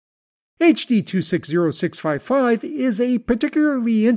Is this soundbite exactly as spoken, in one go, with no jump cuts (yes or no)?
yes